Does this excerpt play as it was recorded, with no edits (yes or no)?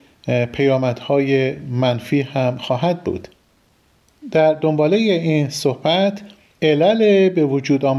yes